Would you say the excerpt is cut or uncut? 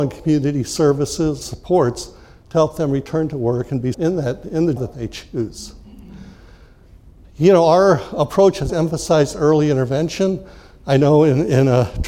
cut